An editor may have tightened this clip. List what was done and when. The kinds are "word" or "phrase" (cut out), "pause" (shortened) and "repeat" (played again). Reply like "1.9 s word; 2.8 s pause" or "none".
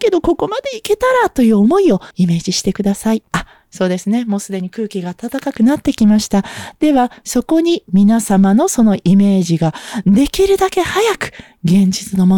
2.1 s pause; 3.3 s pause